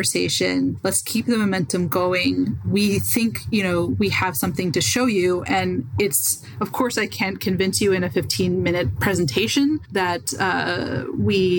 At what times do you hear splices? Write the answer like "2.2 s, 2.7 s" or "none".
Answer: none